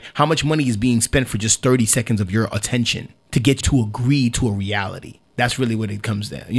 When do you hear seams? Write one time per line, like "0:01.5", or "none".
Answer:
0:03.2
0:03.6
0:05.3